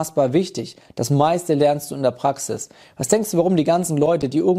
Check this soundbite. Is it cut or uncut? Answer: uncut